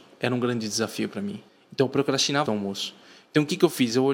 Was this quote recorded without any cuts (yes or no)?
no